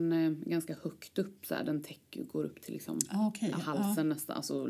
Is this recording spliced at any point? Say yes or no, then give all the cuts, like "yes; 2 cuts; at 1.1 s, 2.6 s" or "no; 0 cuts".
no; 0 cuts